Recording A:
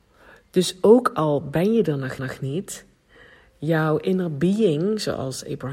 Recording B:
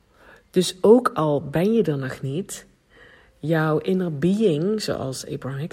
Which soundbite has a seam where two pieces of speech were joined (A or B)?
A